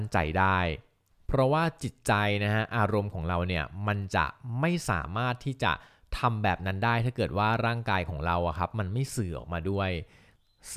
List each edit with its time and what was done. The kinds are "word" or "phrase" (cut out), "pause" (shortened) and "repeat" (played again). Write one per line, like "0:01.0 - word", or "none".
none

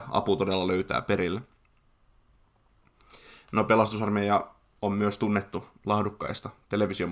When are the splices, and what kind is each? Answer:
none

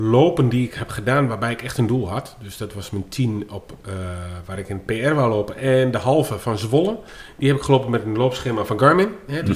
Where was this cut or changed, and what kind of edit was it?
none

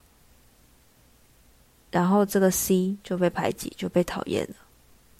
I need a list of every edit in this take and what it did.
none

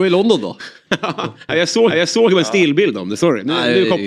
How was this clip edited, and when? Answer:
0:01.9 - repeat

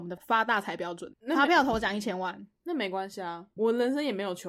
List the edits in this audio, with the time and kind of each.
0:01.1 - word
0:03.6 - word

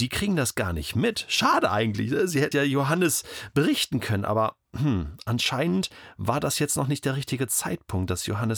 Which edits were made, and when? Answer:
0:02.5 - word
0:04.6 - pause

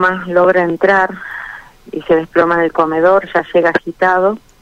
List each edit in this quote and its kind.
none

